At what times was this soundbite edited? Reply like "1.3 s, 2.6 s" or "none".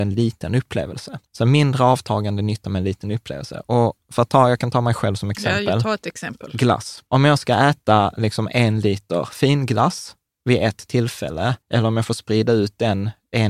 1.3 s, 7.1 s, 11.6 s